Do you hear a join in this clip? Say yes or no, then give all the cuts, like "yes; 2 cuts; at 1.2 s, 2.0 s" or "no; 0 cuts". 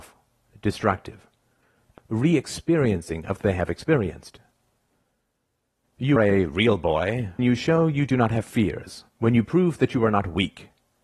yes; 5 cuts; at 2.0 s, 3.4 s, 6.2 s, 7.4 s, 9.1 s